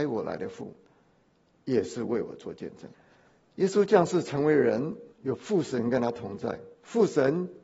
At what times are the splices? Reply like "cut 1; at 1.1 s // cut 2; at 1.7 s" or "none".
cut 1; at 2.9 s // cut 2; at 5.1 s // cut 3; at 6.7 s